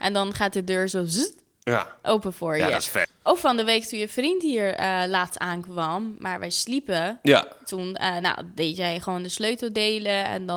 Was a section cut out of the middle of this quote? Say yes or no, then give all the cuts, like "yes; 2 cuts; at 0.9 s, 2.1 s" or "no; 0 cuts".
no; 0 cuts